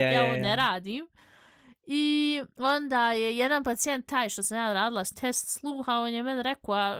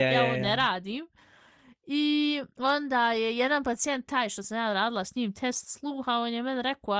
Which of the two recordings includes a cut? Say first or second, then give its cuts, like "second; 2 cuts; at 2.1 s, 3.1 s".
first; 1 cut; at 5.1 s